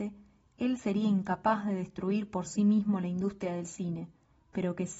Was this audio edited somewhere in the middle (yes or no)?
no